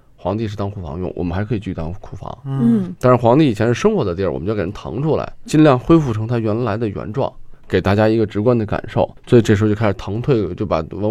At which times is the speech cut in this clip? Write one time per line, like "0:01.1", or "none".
0:05.5